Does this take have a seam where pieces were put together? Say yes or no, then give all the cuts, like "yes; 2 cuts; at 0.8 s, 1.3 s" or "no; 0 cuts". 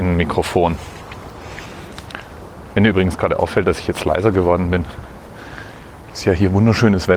no; 0 cuts